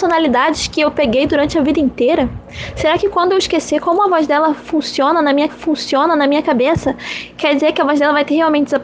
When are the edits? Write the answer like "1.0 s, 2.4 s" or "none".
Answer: 5.5 s